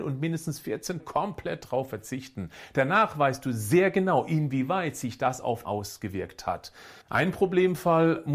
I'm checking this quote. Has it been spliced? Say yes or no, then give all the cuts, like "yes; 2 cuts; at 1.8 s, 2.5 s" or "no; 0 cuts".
yes; 3 cuts; at 1.0 s, 5.6 s, 7.0 s